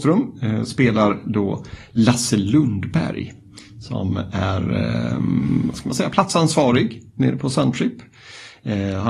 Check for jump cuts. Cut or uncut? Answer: uncut